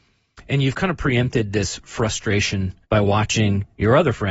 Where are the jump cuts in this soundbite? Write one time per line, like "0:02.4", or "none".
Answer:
0:02.8